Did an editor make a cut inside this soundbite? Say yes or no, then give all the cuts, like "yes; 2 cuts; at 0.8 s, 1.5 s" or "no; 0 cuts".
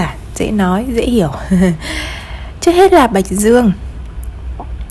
no; 0 cuts